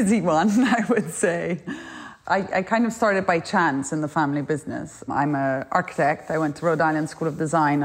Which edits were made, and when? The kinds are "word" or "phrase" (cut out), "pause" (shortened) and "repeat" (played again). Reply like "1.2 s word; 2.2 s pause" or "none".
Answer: none